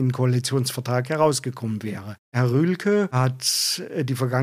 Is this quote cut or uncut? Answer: uncut